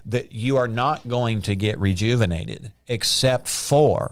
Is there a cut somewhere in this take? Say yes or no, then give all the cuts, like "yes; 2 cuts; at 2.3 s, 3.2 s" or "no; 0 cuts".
no; 0 cuts